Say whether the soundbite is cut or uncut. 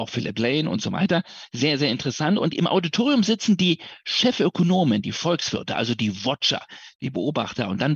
uncut